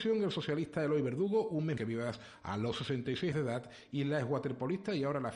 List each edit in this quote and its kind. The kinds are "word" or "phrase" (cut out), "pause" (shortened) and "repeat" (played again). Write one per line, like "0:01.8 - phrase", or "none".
0:01.8 - word
0:03.3 - word